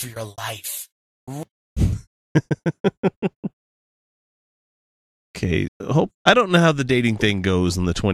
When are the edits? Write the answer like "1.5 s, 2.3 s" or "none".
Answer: 5.7 s, 6.2 s